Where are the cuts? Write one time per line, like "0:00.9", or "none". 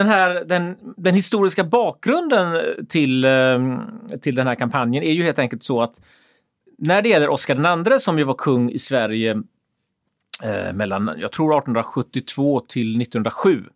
none